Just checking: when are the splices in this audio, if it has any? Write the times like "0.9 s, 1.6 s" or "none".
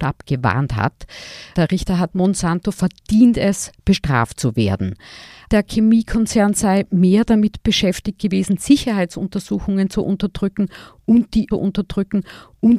2.1 s, 11.5 s